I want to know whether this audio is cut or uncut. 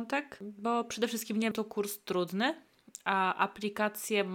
cut